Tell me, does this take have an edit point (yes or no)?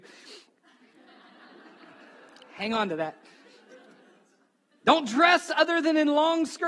no